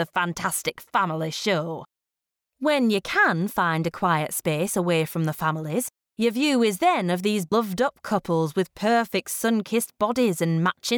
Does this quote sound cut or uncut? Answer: uncut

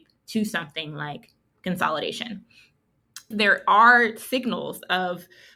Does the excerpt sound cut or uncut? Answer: cut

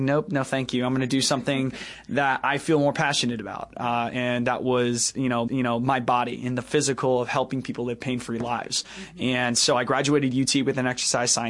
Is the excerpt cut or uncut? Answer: cut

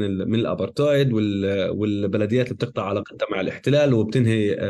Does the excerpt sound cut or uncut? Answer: uncut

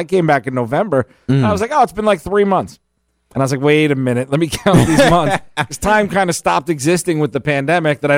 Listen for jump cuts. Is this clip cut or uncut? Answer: uncut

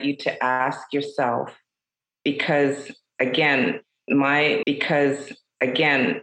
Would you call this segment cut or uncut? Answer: cut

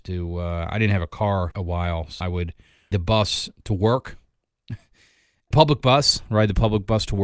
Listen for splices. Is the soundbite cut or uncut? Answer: cut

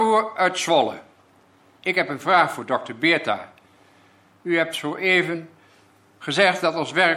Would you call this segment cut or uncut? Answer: uncut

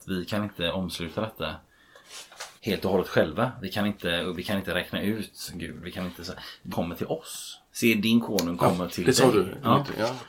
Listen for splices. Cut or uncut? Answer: cut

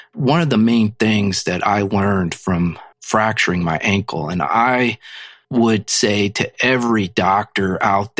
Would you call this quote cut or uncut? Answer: cut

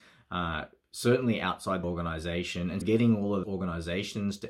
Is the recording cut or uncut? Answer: cut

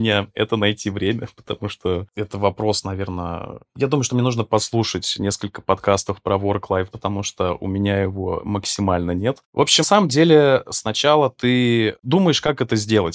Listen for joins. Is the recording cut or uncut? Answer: cut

